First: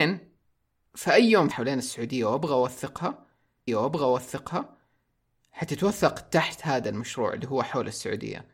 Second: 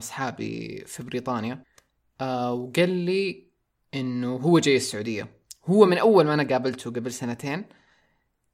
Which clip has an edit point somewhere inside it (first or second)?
first